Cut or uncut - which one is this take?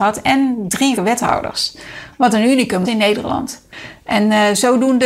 cut